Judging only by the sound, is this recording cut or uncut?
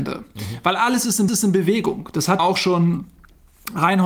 cut